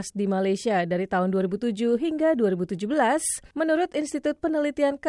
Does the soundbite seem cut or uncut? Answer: uncut